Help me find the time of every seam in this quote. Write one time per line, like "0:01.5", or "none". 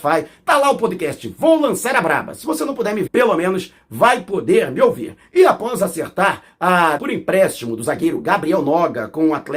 0:03.1
0:07.0